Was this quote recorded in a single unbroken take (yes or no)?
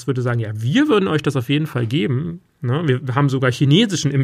yes